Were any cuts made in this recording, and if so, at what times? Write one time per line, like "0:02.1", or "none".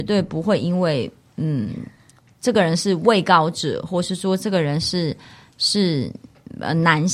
none